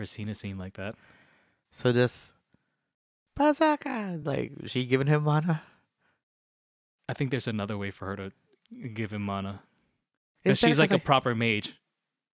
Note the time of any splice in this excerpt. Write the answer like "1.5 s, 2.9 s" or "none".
none